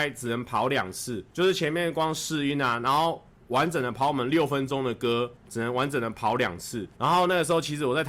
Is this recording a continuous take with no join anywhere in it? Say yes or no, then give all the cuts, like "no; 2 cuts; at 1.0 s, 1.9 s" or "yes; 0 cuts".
no; 3 cuts; at 1.3 s, 5.4 s, 7.0 s